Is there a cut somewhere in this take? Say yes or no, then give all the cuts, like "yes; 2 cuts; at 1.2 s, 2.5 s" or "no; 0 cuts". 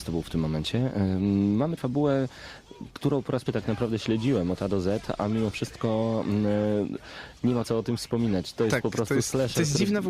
yes; 3 cuts; at 1.8 s, 3.5 s, 7.6 s